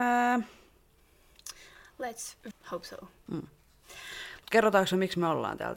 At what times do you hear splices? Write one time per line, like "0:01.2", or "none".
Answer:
0:02.5